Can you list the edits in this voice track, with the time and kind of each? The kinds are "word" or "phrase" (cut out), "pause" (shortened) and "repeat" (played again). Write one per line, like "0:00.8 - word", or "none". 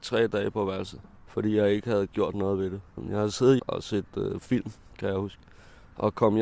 0:01.2 - pause
0:03.6 - phrase